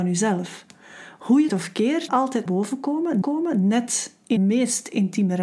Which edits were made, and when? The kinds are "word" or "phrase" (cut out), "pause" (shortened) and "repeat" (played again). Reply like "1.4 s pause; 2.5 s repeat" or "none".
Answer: 1.5 s phrase; 2.1 s phrase; 2.5 s word; 3.2 s repeat; 4.4 s word